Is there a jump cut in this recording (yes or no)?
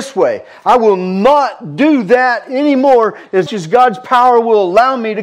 yes